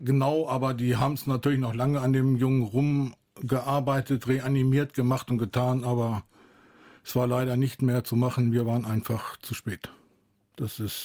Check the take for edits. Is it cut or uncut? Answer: uncut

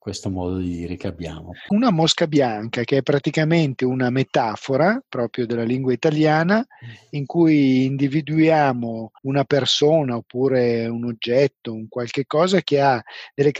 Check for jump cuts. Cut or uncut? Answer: cut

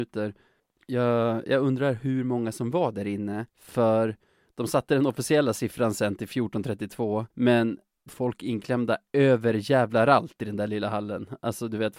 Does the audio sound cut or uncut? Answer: cut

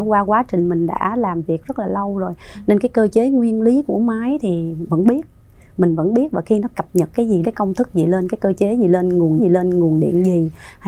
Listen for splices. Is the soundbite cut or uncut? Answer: cut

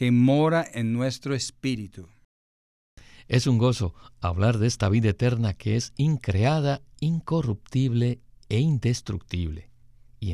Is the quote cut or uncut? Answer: uncut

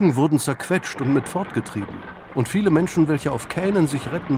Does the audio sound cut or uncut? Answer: uncut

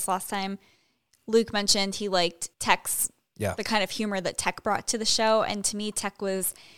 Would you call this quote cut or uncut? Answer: cut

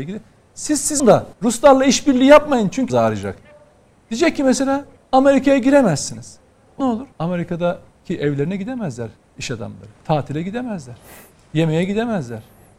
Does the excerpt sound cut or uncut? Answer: cut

